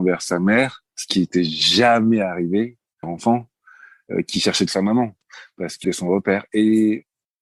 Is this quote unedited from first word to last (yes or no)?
no